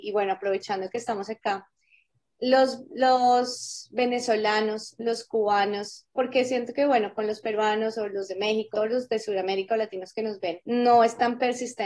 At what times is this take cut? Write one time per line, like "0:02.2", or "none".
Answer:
0:08.7
0:10.6

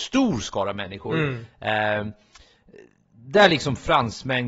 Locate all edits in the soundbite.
none

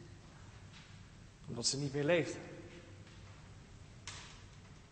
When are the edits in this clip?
none

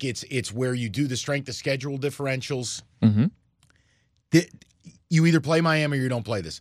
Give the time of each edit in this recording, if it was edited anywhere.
none

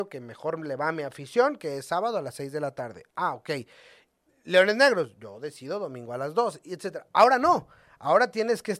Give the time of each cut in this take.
none

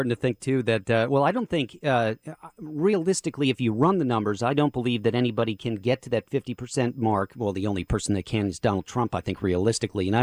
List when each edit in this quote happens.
none

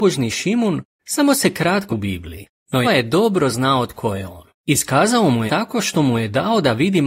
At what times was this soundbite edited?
0:01.9
0:02.8
0:04.5
0:05.5

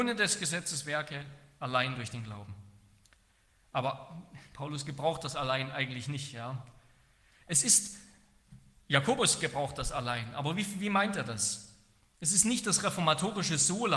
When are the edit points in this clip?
none

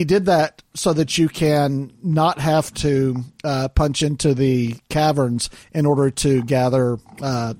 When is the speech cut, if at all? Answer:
none

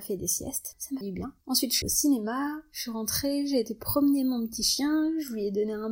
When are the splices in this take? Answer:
0:01.0
0:01.8

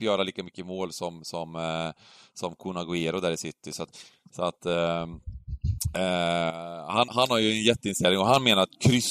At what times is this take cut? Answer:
0:07.1

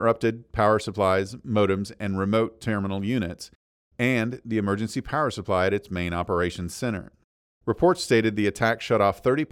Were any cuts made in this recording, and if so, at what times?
0:07.3

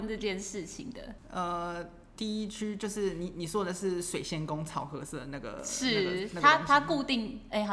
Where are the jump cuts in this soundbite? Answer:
none

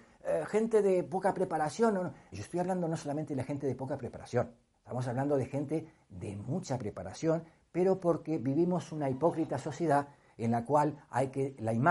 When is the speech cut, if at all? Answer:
0:02.3
0:04.7

